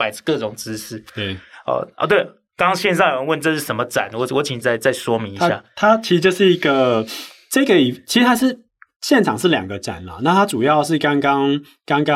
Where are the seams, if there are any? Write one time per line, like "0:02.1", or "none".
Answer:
0:04.6